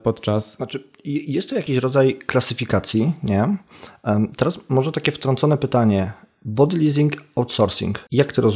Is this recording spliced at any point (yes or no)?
no